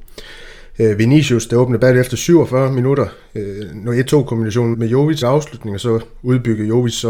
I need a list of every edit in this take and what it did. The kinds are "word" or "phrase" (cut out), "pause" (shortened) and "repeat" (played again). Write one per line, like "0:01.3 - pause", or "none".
0:04.7 - word
0:05.2 - phrase